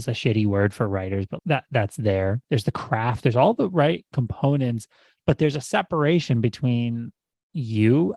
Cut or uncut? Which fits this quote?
cut